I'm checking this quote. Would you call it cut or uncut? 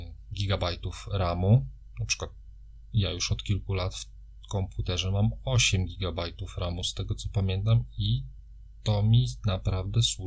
uncut